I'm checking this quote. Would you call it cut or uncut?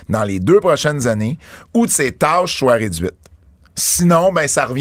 uncut